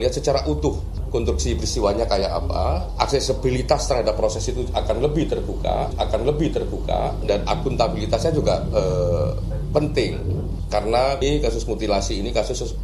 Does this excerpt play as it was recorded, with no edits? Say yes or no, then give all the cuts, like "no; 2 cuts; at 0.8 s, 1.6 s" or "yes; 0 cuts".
no; 1 cut; at 5.9 s